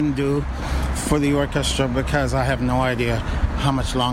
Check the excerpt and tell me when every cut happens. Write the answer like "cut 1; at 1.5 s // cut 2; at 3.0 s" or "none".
none